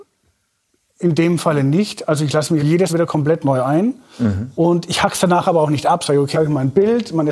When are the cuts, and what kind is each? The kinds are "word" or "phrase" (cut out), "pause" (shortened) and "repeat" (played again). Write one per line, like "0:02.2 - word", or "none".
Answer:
0:02.6 - word
0:02.9 - word
0:06.3 - word